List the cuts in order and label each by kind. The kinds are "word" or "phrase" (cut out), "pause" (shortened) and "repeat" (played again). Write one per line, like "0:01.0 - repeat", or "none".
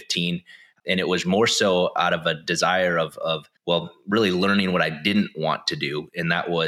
0:03.6 - pause